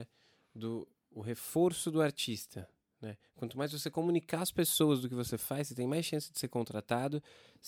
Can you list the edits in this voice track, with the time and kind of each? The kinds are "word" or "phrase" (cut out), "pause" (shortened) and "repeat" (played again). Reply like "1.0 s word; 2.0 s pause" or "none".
none

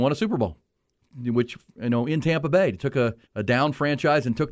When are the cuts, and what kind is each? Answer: 3.2 s pause

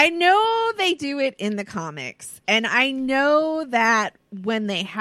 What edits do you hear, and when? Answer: none

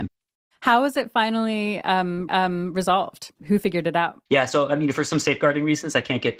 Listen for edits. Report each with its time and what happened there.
2.3 s repeat; 4.3 s pause

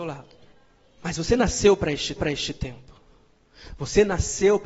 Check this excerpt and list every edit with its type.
2.2 s repeat

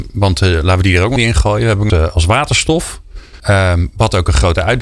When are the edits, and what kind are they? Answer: 1.2 s word; 1.9 s phrase; 3.4 s pause

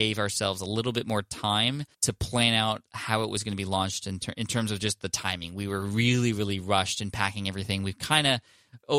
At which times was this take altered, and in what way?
1.9 s pause

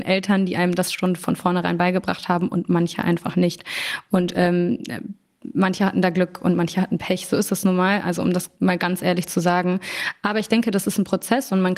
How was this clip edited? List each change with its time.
none

